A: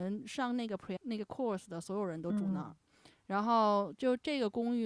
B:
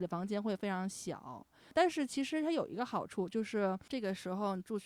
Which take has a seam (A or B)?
A